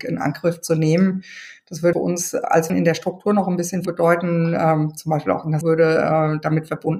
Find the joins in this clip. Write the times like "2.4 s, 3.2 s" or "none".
1.9 s, 2.7 s, 3.8 s, 5.6 s